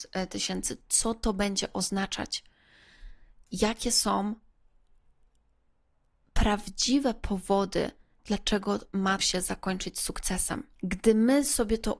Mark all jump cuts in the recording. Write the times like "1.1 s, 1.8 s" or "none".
8.2 s, 9.2 s